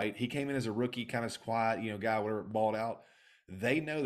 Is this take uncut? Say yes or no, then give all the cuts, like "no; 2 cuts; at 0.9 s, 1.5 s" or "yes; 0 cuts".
yes; 0 cuts